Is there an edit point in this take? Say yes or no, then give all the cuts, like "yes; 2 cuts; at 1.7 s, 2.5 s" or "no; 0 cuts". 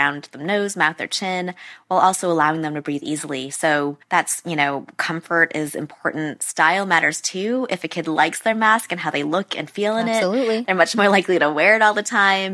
yes; 1 cut; at 4.0 s